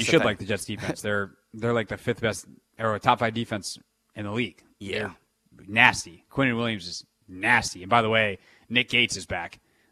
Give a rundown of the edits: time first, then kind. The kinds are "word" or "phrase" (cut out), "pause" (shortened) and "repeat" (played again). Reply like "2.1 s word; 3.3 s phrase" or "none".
none